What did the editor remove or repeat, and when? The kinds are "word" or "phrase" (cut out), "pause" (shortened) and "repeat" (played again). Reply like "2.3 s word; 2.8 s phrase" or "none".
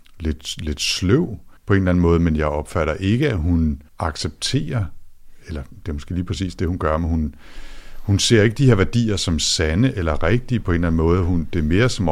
1.6 s pause; 3.9 s pause